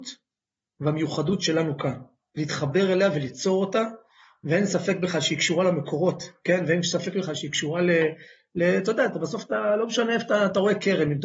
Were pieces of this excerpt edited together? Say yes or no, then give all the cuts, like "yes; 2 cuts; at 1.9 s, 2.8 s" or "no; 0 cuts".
no; 0 cuts